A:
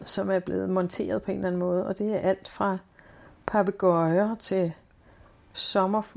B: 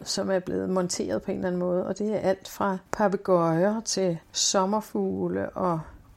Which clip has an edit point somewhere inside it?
B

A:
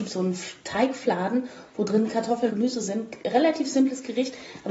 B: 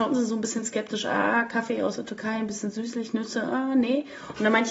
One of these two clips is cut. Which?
A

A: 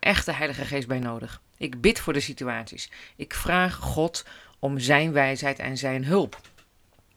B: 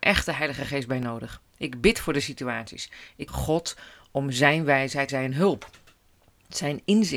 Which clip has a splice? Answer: B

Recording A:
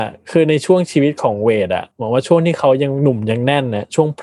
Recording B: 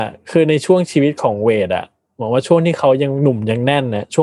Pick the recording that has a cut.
A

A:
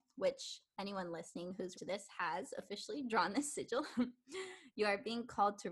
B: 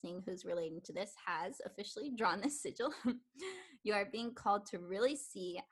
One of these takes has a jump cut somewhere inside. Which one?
A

